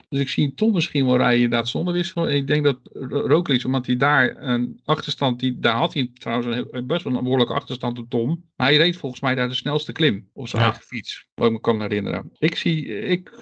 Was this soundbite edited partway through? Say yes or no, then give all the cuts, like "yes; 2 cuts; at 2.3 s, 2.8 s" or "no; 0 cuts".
no; 0 cuts